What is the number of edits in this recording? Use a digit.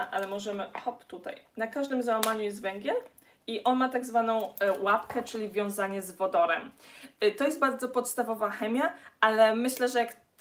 0